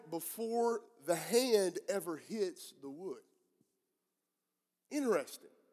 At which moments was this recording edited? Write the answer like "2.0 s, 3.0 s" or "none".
none

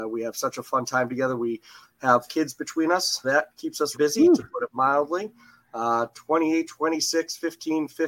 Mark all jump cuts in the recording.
2.3 s, 3.2 s, 3.9 s

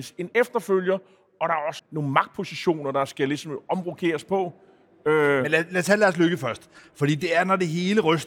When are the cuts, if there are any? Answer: 1.8 s

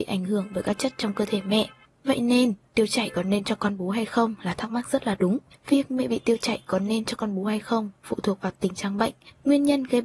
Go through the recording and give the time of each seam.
none

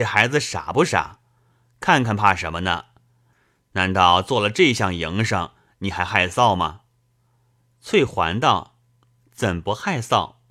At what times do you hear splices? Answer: none

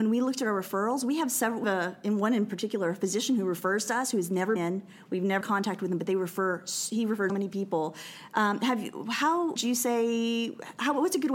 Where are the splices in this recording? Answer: 1.6 s, 4.6 s, 5.4 s, 7.3 s, 9.6 s

